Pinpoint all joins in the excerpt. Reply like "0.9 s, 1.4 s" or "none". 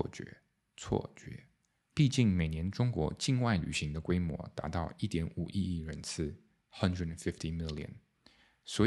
none